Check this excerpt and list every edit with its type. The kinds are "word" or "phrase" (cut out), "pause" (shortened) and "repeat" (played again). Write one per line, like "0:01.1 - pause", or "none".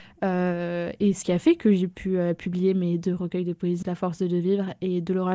0:01.2 - word
0:03.8 - word

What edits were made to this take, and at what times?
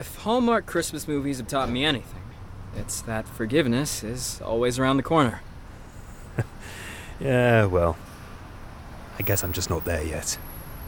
none

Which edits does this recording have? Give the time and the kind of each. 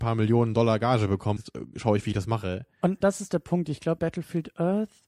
0:01.4 - word
0:03.0 - word
0:04.0 - word

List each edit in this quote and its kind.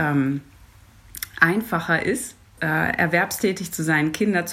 0:02.6 - word

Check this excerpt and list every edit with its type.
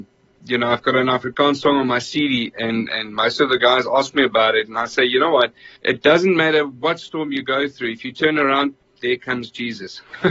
0:05.8 - pause

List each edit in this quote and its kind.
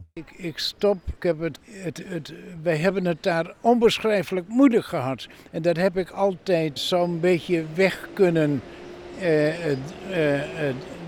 0:01.2 - word
0:01.6 - word
0:02.0 - word
0:06.8 - word

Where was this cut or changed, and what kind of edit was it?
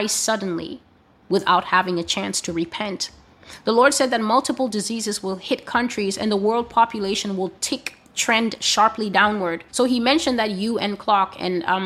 0:08.0 - pause
0:09.7 - pause

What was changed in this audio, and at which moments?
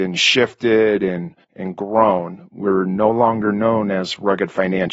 0:01.4 - pause

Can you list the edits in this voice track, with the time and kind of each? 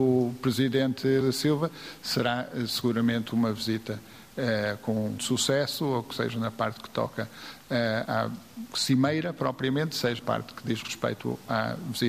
0:01.2 - word
0:05.2 - word
0:08.0 - word
0:10.2 - word

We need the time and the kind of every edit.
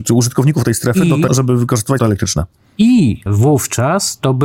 0:01.3 - word
0:02.0 - word
0:03.3 - word

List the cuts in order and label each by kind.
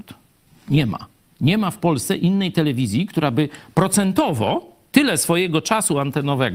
none

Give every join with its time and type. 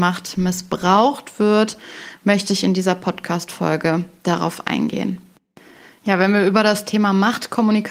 none

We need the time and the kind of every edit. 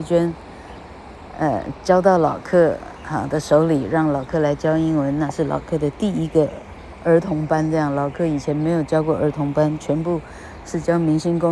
none

